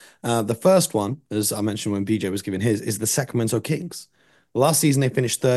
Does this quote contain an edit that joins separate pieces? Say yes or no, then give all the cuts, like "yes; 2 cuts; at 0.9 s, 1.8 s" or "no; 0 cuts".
no; 0 cuts